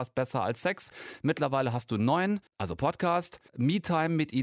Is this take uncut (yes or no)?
no